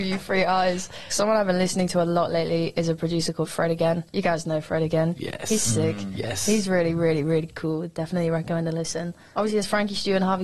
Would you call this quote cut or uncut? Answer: uncut